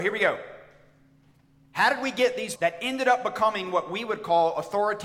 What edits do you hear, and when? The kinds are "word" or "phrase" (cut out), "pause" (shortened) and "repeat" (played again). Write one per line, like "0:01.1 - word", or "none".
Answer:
0:02.6 - word